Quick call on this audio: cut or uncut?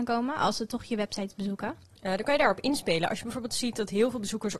uncut